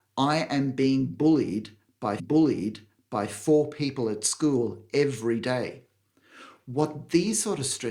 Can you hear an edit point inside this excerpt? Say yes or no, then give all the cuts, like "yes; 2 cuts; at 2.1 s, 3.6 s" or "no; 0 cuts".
yes; 1 cut; at 2.2 s